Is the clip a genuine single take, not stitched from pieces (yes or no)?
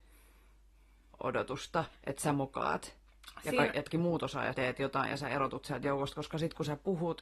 no